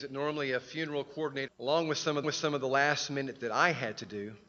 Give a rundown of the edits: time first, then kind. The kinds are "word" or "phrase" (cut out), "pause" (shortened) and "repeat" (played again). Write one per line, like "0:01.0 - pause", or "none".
0:01.5 - phrase
0:02.2 - repeat
0:03.4 - word